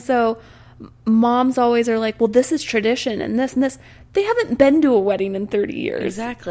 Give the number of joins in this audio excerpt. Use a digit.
0